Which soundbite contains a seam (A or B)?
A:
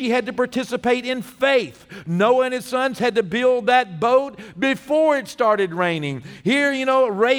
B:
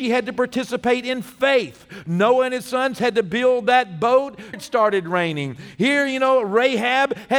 B